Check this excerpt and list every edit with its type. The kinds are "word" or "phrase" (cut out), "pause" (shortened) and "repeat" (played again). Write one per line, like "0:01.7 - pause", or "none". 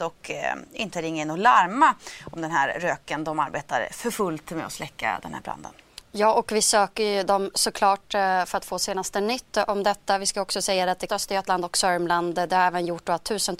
0:11.1 - phrase